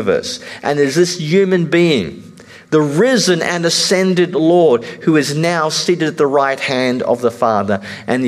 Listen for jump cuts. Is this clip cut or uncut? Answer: uncut